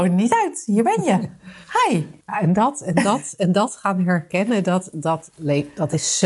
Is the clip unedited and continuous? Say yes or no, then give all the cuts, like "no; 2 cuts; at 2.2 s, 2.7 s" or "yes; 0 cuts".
no; 1 cut; at 2.2 s